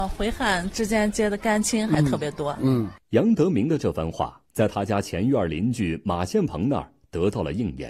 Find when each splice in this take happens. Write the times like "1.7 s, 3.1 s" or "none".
3.0 s, 4.4 s